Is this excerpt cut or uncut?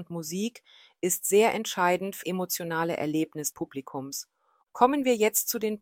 cut